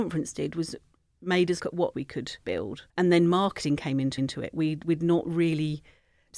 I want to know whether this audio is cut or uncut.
cut